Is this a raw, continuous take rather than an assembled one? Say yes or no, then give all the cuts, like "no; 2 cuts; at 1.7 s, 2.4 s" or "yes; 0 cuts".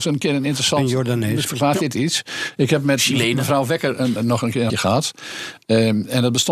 no; 3 cuts; at 1.5 s, 4.2 s, 4.7 s